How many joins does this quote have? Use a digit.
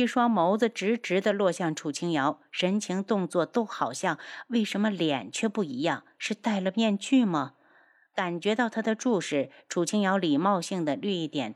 0